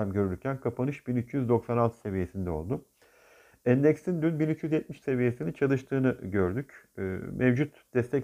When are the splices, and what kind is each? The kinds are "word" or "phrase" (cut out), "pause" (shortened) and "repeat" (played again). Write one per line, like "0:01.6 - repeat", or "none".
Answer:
0:05.0 - word